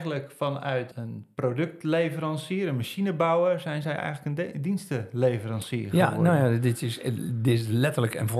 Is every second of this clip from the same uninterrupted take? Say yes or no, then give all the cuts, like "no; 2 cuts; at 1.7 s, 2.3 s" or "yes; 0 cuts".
no; 1 cut; at 0.9 s